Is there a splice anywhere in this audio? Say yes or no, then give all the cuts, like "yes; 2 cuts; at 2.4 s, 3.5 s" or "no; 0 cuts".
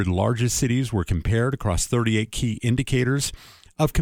no; 0 cuts